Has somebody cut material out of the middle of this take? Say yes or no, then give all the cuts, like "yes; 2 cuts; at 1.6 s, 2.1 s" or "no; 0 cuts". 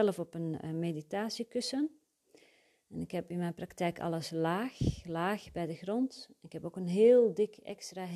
no; 0 cuts